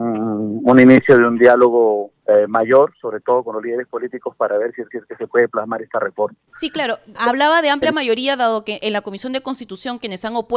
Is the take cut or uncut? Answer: cut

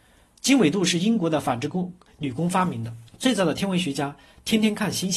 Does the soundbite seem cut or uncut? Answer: cut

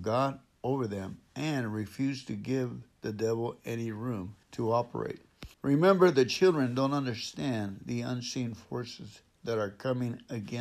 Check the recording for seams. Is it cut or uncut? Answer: cut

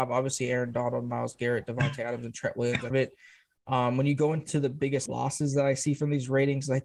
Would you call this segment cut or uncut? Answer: cut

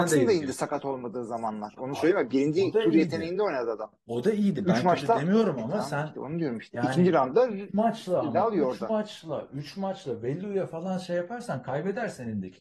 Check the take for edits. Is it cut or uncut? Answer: uncut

